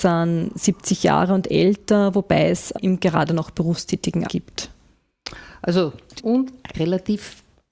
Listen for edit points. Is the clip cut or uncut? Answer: cut